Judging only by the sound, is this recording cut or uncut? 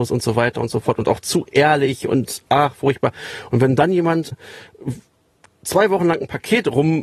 cut